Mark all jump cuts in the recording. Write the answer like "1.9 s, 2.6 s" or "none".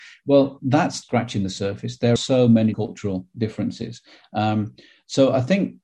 1.0 s, 2.2 s, 2.7 s